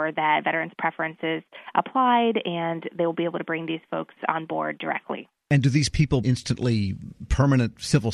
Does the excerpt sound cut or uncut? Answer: cut